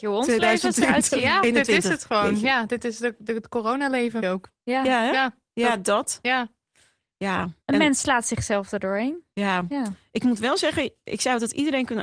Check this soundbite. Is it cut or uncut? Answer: cut